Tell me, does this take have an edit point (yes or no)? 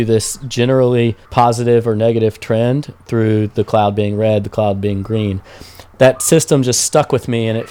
yes